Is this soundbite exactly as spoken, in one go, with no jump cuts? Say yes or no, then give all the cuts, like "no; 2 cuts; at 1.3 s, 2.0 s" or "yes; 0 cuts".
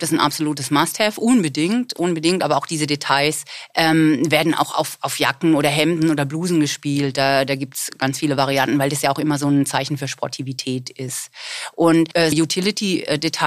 no; 1 cut; at 12.3 s